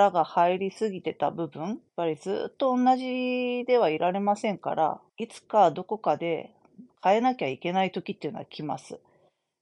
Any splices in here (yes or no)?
yes